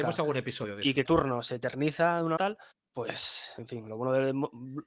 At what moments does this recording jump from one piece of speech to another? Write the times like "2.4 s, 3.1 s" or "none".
1.0 s, 2.4 s, 2.7 s